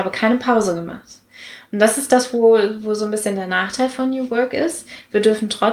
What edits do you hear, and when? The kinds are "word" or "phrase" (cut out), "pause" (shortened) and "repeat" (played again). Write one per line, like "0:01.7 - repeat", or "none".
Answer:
none